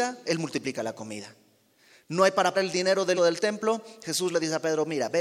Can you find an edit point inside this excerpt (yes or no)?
yes